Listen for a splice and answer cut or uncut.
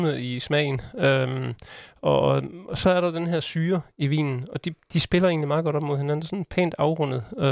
uncut